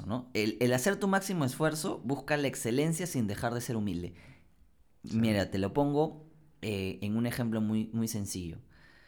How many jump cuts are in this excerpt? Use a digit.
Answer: 0